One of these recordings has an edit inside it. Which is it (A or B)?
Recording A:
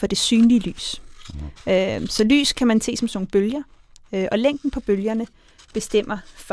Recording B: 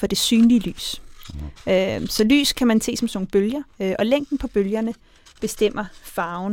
B